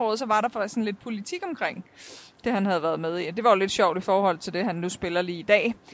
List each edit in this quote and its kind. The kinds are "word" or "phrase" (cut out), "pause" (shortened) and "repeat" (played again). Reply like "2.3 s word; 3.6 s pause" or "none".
none